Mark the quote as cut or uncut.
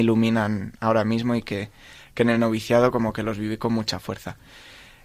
uncut